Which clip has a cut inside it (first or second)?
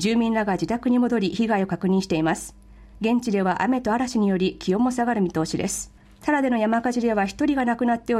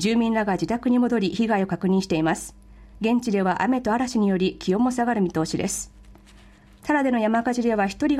first